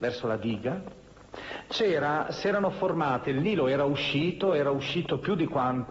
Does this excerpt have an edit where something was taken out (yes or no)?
no